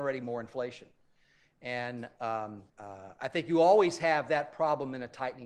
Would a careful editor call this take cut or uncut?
cut